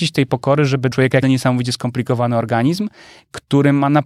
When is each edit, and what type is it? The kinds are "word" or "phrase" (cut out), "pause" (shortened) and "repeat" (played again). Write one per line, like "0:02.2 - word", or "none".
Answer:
0:00.9 - phrase
0:01.2 - word

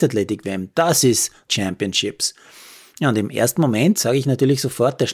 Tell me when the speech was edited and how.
0:01.5 - phrase

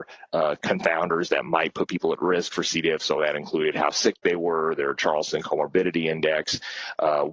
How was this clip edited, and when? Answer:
none

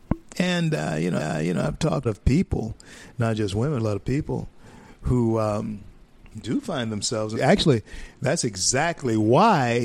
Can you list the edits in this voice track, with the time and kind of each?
0:01.2 - repeat
0:02.0 - phrase
0:03.8 - phrase
0:06.3 - pause
0:07.3 - word

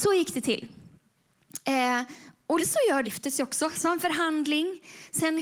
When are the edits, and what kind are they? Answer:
0:02.6 - word
0:03.0 - phrase
0:03.8 - word

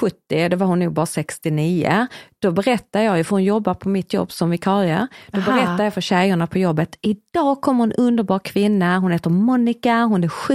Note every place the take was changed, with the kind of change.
none

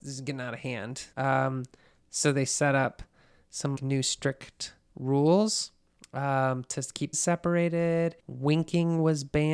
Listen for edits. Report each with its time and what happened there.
0:01.1 - pause
0:03.8 - word
0:06.0 - pause
0:07.1 - phrase
0:08.2 - pause

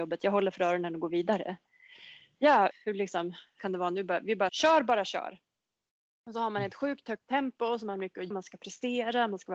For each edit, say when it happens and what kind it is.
0:02.7 - word
0:03.6 - word
0:04.5 - word
0:08.3 - word

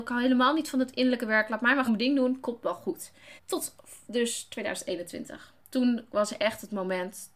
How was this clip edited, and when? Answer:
0:01.9 - word
0:03.4 - pause
0:05.6 - pause

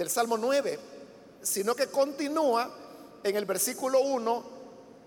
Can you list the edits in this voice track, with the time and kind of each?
none

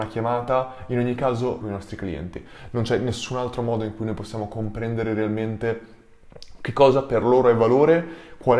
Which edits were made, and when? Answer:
0:01.6 - phrase

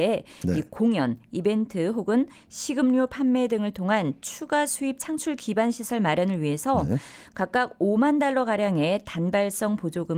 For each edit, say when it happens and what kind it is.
none

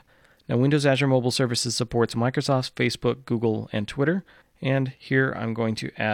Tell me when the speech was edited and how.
0:04.4 - pause

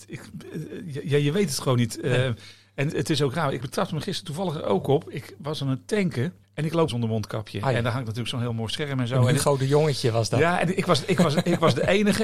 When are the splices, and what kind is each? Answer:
0:02.9 - word
0:03.6 - word
0:06.4 - pause
0:06.9 - phrase

